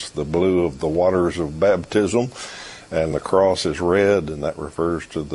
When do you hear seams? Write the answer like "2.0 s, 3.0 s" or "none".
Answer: 3.1 s